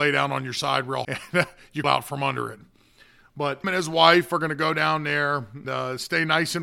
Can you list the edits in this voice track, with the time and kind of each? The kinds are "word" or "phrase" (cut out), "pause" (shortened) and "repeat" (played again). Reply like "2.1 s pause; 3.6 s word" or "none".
1.0 s word; 1.8 s word; 3.6 s word; 5.6 s word